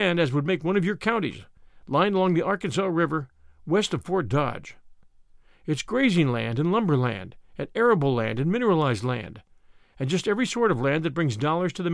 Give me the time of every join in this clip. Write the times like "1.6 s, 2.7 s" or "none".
none